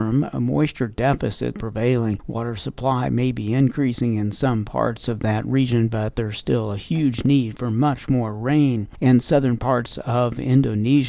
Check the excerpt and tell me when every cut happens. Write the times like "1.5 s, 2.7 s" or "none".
1.5 s